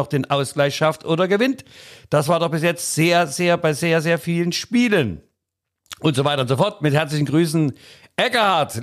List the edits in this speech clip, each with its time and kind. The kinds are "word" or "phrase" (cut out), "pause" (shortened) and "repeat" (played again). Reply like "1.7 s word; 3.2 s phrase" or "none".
none